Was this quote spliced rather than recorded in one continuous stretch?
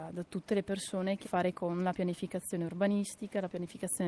yes; 1 cut; at 1.2 s

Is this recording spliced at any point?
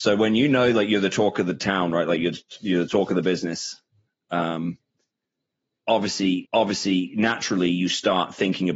yes; 1 cut; at 6.4 s

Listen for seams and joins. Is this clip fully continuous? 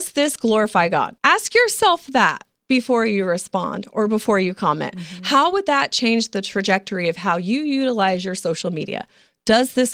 no; 1 cut; at 1.2 s

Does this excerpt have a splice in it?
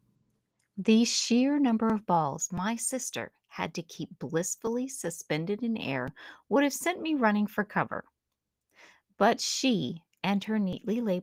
no; 0 cuts

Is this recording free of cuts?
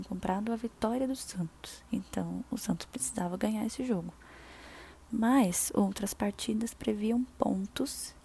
yes; 0 cuts

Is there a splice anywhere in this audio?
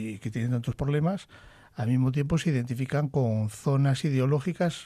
no; 0 cuts

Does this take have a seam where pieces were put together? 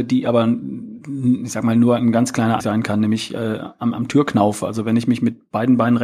yes; 1 cut; at 2.6 s

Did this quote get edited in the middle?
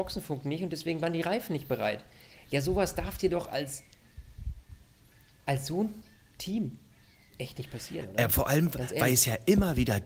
no; 0 cuts

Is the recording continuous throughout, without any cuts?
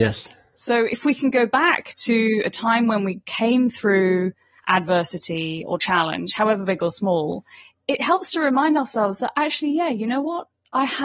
yes; 0 cuts

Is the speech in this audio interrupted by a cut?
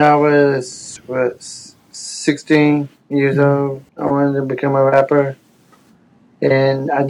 yes; 2 cuts; at 2.9 s, 3.9 s

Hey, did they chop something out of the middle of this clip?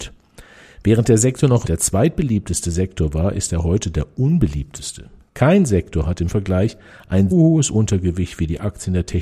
yes; 3 cuts; at 1.6 s, 6.3 s, 7.3 s

